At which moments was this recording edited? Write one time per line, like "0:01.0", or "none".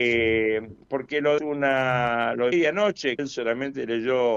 0:01.4
0:02.5
0:03.2